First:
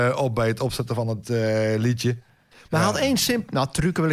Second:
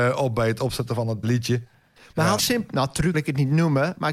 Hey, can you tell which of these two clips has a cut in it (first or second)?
second